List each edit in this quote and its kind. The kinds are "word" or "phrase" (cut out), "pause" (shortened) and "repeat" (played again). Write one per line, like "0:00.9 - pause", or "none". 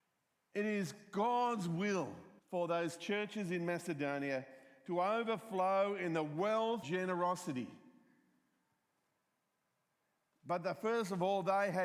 0:02.4 - pause
0:06.8 - word